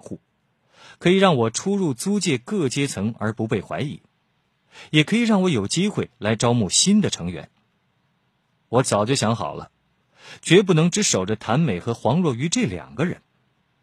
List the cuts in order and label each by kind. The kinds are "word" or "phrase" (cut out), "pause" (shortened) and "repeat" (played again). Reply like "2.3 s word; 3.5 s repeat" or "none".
none